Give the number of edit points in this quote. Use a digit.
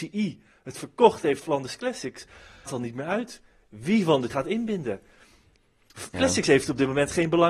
4